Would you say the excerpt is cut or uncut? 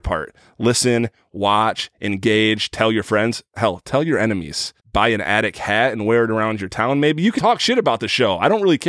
cut